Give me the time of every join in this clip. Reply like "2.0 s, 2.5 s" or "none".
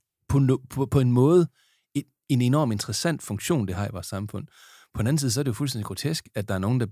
none